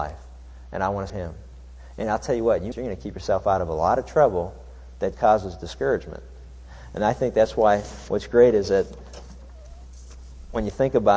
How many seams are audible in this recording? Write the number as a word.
three